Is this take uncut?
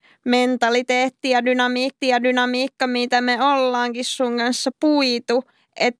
no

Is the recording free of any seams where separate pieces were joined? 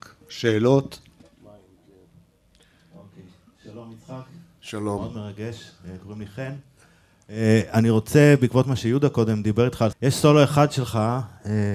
no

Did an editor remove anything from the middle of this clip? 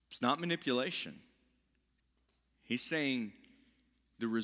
yes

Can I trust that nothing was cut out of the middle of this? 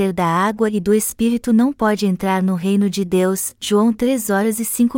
yes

